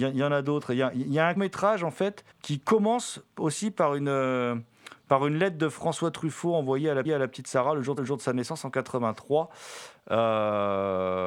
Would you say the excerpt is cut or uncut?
cut